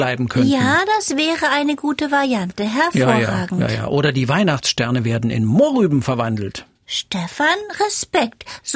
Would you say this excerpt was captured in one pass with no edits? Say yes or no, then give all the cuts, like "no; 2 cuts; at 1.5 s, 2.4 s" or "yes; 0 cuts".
yes; 0 cuts